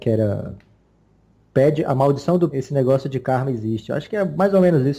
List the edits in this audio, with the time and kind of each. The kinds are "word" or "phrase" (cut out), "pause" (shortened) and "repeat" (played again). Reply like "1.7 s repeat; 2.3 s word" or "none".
2.5 s word